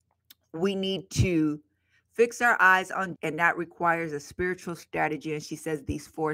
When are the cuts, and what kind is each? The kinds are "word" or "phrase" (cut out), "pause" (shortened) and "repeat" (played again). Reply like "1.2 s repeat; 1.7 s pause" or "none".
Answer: 3.2 s word